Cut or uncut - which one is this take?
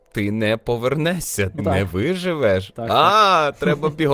cut